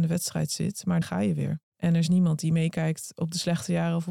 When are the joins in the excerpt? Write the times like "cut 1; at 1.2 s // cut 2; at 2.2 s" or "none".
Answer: cut 1; at 1.0 s // cut 2; at 1.7 s